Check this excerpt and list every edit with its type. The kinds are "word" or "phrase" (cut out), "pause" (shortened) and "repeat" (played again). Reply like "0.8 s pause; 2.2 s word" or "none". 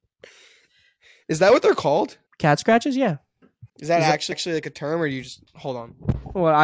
2.3 s pause; 3.7 s pause; 4.3 s repeat